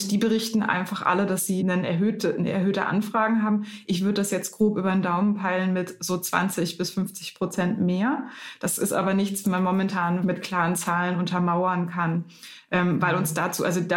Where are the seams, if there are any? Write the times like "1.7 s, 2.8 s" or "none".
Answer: 1.6 s, 9.4 s, 10.2 s